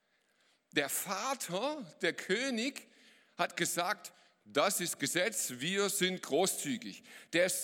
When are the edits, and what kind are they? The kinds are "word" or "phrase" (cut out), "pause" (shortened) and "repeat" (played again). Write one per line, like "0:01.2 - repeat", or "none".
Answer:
none